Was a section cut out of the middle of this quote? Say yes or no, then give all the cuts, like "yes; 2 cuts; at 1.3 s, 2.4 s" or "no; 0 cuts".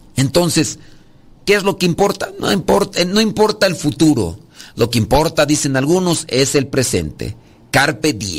no; 0 cuts